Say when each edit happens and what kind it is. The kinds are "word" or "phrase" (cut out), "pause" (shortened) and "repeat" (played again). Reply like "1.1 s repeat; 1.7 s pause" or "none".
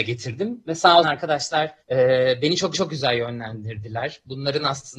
1.0 s phrase; 1.8 s pause; 2.7 s repeat